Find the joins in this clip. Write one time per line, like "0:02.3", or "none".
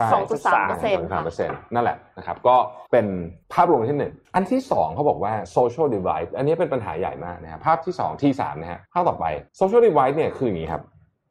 0:02.9
0:03.4
0:04.2
0:08.9
0:09.5